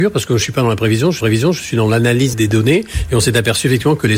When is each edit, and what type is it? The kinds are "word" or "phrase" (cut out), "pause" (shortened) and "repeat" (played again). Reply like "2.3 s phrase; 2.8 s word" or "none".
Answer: 1.2 s repeat; 2.3 s word